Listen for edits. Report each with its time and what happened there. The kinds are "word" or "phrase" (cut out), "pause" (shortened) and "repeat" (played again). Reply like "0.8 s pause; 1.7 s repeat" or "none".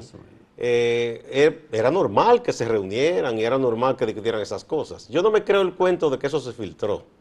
none